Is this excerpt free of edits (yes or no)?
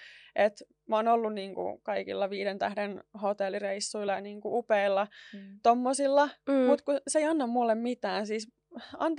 yes